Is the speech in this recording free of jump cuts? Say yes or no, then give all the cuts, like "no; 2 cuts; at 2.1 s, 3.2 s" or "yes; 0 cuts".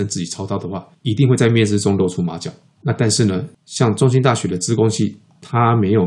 yes; 0 cuts